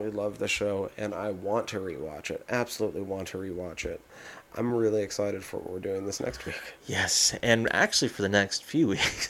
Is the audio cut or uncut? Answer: uncut